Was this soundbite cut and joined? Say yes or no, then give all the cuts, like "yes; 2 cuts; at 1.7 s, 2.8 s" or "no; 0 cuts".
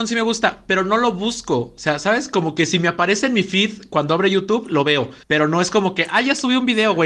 yes; 1 cut; at 5.2 s